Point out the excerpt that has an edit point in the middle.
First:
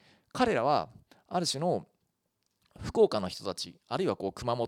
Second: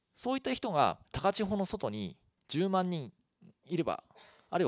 second; 1 cut; at 1.0 s

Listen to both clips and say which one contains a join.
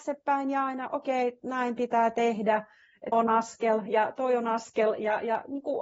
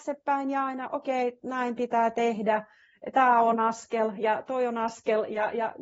first; 1 cut; at 3.1 s

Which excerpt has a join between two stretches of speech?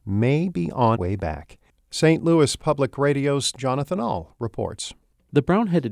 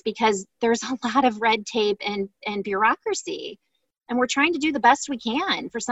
first; 1 cut; at 0.9 s

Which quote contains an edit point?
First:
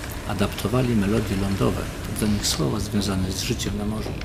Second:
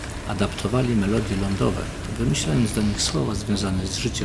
first; 1 cut; at 2.2 s

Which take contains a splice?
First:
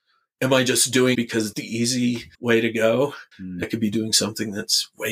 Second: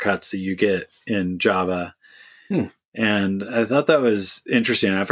first; 5 cuts; at 1.1 s, 1.5 s, 2.3 s, 3.3 s, 3.6 s

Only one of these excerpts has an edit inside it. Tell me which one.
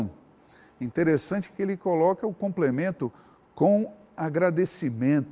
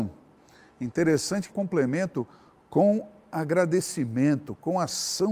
second; 1 cut; at 1.5 s

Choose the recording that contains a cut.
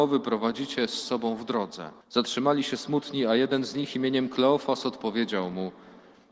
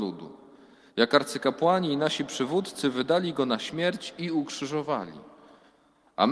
first; 1 cut; at 2.0 s

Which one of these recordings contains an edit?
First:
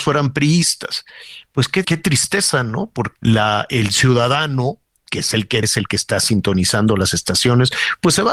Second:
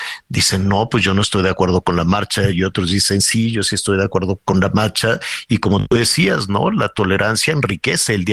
first; 3 cuts; at 1.8 s, 3.2 s, 5.6 s

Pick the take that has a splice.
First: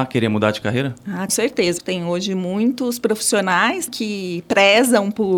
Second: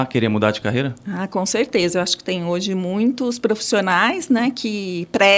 first; 3 cuts; at 1.3 s, 1.8 s, 3.9 s

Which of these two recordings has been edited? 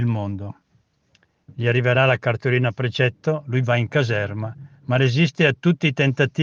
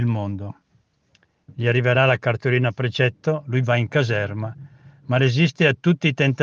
first; 1 cut; at 4.8 s

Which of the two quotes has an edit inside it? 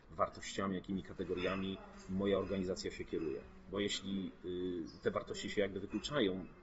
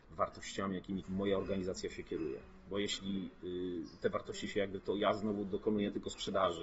second; 2 cuts; at 1.0 s, 4.8 s

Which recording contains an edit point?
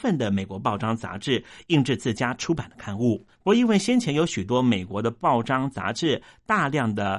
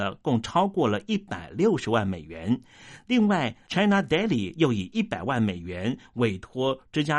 first; 1 cut; at 3.3 s

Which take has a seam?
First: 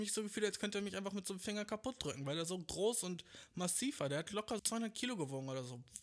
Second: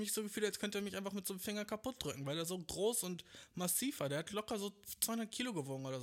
first; 1 cut; at 4.6 s

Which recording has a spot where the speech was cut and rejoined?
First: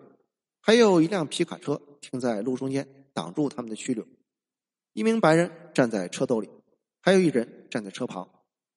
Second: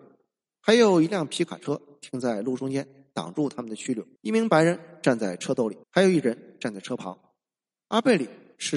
second; 2 cuts; at 4.2 s, 5.8 s

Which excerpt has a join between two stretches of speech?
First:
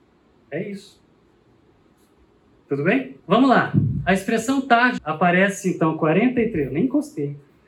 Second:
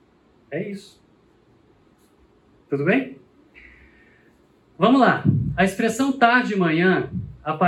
first; 2 cuts; at 3.2 s, 5.0 s

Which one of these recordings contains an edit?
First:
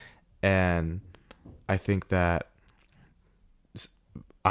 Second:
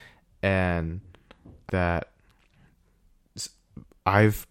second; 1 cut; at 1.7 s

